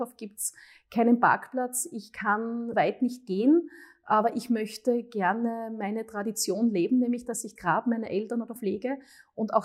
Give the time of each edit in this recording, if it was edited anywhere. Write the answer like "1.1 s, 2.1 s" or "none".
2.7 s, 7.6 s, 8.6 s